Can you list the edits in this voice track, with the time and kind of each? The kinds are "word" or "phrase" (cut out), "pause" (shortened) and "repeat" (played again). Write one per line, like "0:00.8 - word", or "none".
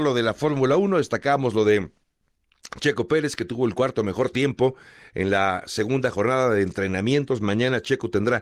none